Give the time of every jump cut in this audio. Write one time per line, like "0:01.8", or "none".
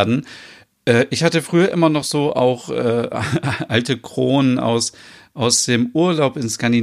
none